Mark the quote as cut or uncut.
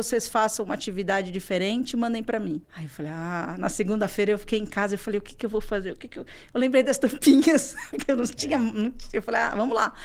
cut